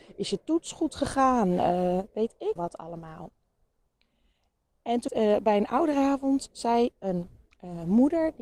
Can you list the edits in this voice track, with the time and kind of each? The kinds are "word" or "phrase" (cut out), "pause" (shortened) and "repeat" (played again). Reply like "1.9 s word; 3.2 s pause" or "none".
2.6 s word; 5.1 s word